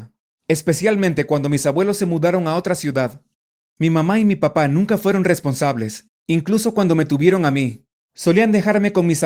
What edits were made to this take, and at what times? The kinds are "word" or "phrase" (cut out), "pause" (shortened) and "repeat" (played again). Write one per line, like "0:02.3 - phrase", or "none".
none